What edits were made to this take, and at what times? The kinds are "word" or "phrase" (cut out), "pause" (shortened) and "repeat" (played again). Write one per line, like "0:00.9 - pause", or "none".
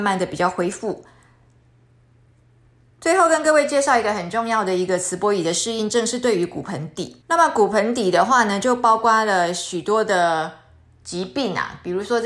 0:07.2 - pause